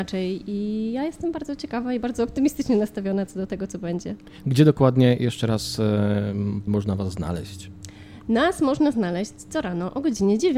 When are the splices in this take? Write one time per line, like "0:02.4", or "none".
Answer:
0:06.7